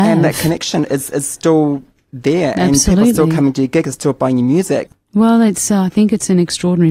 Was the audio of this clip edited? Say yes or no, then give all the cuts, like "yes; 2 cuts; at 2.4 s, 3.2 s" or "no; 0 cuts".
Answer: no; 0 cuts